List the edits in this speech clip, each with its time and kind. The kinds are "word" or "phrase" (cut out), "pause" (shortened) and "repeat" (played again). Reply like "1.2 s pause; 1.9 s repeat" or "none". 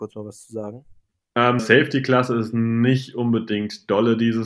1.6 s word